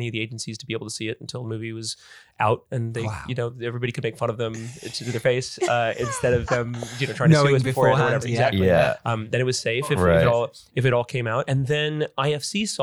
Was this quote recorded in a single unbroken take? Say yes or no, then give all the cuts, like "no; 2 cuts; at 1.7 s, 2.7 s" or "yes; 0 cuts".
yes; 0 cuts